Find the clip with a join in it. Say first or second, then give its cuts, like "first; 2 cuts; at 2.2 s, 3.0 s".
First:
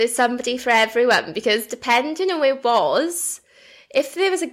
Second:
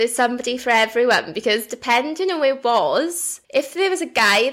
second; 1 cut; at 3.4 s